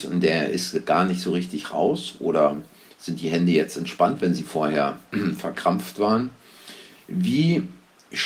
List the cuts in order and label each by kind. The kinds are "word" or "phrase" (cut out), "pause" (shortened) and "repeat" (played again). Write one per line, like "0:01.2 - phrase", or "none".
none

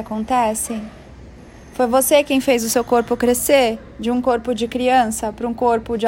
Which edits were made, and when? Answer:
none

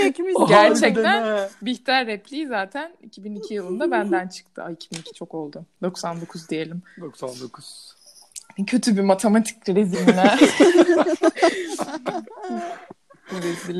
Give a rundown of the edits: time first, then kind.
0:09.9 - word

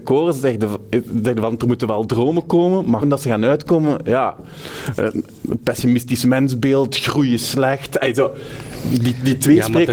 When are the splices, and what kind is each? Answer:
0:03.0 - word

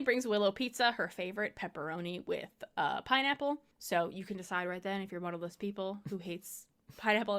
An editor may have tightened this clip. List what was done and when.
0:03.7 - pause

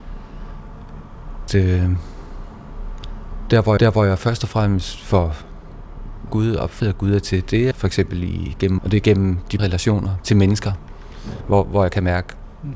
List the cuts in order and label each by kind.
0:01.5 - word
0:03.8 - repeat
0:06.3 - word
0:06.8 - word
0:07.7 - word
0:08.8 - word
0:09.6 - phrase
0:10.2 - word

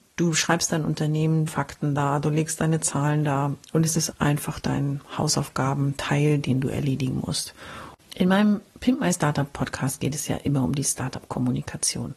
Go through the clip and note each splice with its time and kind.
0:01.5 - phrase
0:04.1 - word
0:08.7 - pause

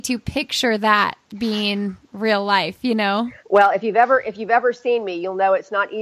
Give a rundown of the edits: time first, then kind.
0:03.4 - pause

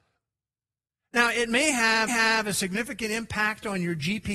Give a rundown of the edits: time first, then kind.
0:02.1 - repeat

